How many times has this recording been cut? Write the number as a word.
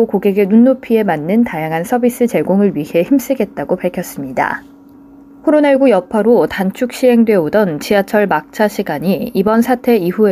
one